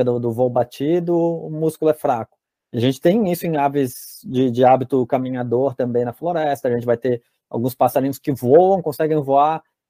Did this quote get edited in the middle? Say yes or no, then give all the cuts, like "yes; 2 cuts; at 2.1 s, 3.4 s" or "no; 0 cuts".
no; 0 cuts